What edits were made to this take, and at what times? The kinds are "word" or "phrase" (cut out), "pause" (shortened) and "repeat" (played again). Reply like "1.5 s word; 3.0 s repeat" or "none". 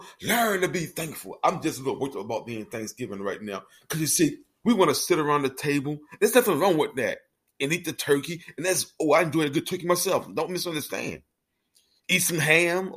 none